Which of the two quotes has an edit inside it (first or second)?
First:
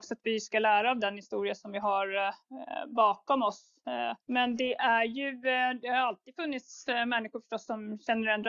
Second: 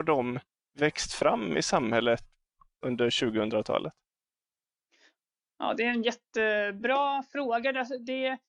first